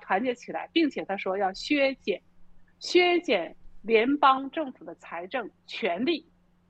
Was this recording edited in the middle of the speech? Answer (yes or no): yes